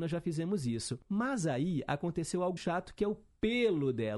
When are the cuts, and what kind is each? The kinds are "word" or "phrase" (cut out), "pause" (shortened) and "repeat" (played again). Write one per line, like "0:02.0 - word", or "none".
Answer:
0:01.0 - pause
0:02.6 - word